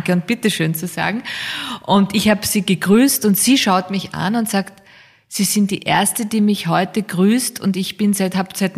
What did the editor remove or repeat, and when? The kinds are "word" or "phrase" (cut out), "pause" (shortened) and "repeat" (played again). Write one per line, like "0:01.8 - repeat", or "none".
none